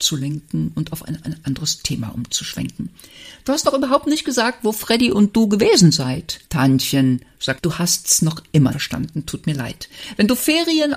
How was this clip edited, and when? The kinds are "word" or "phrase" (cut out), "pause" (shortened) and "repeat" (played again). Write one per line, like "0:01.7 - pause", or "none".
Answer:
0:01.2 - repeat
0:06.5 - pause
0:07.6 - phrase
0:08.7 - word